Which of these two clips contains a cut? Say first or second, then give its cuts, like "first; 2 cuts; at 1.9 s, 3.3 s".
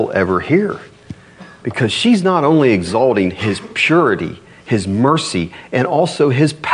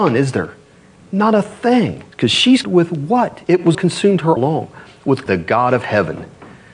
second; 5 cuts; at 2.1 s, 2.6 s, 3.7 s, 4.4 s, 5.3 s